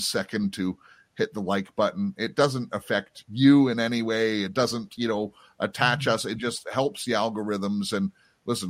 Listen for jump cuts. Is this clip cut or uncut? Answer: uncut